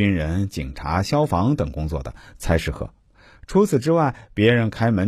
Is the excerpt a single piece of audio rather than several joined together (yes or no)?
yes